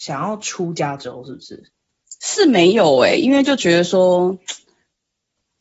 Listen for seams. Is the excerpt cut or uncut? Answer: uncut